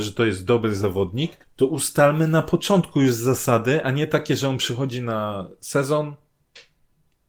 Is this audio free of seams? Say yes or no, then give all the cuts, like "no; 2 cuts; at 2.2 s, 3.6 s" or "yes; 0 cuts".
no; 1 cut; at 1.4 s